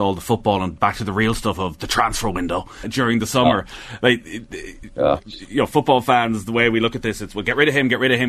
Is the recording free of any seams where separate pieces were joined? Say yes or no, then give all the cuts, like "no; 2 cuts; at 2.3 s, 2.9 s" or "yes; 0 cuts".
no; 1 cut; at 2.8 s